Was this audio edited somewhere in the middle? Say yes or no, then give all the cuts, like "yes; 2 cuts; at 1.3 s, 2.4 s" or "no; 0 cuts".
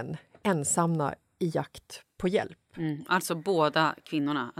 no; 0 cuts